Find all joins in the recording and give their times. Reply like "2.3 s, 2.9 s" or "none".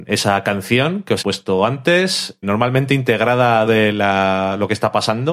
1.2 s, 2.4 s, 3.7 s

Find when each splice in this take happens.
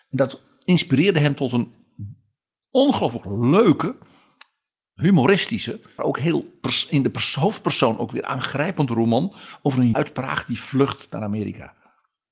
6.0 s, 9.9 s

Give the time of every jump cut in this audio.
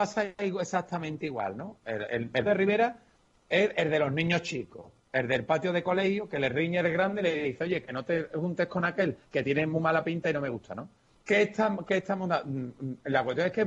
2.5 s, 11.1 s

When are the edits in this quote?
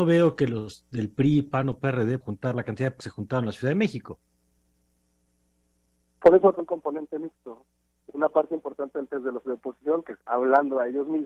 2.2 s, 3.0 s, 6.6 s, 9.1 s, 9.4 s, 10.2 s

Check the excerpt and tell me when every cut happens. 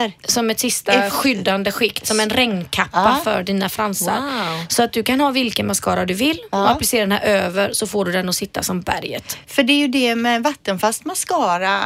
none

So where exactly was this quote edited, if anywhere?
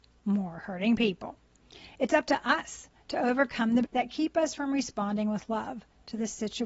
3.8 s

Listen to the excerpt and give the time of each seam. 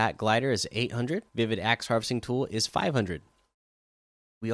1.3 s

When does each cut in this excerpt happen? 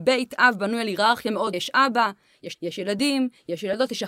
1.5 s, 2.5 s

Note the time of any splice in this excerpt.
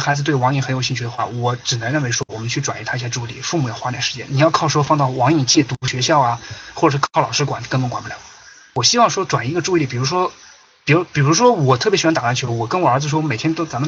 none

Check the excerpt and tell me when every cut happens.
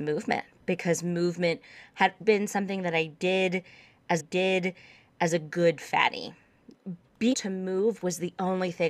2.2 s, 4.2 s, 7.3 s

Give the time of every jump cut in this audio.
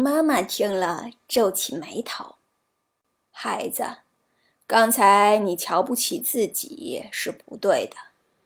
none

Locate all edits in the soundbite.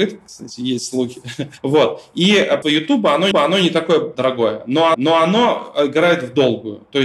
1.6 s, 2.6 s, 3.3 s, 4.9 s

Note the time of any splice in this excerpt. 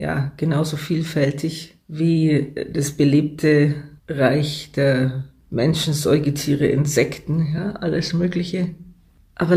1.8 s, 4.0 s

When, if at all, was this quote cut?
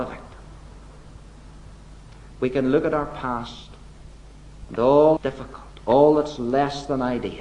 5.2 s

